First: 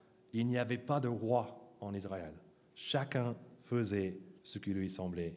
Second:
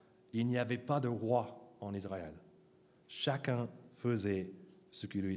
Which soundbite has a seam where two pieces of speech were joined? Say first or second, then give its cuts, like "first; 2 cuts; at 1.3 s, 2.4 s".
first; 2 cuts; at 2.5 s, 4.4 s